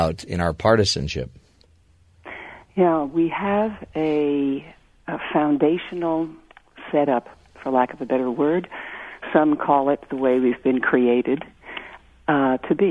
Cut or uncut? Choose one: cut